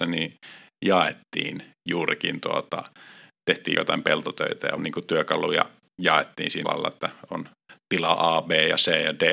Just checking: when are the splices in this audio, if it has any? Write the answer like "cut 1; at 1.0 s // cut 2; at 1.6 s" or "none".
cut 1; at 3.7 s // cut 2; at 4.8 s // cut 3; at 5.9 s // cut 4; at 6.6 s